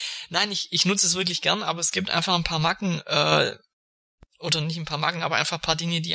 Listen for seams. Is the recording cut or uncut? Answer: uncut